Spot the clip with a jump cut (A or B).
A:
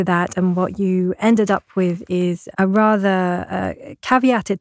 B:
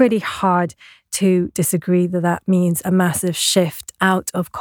A